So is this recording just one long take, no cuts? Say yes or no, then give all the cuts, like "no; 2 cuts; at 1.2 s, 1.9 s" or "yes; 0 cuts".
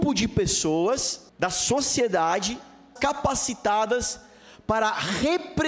no; 2 cuts; at 1.3 s, 3.0 s